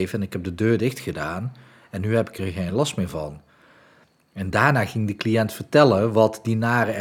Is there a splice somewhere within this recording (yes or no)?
no